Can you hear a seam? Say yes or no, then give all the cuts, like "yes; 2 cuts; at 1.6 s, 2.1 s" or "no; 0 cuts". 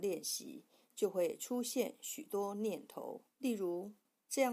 yes; 1 cut; at 3.3 s